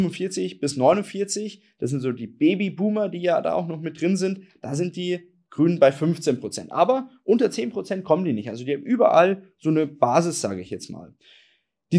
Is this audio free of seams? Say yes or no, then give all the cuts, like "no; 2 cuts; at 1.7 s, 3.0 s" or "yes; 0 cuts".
yes; 0 cuts